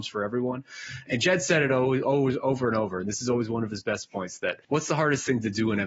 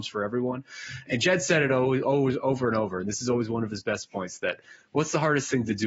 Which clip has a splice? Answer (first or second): first